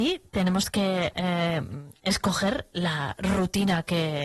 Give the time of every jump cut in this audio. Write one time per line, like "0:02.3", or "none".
none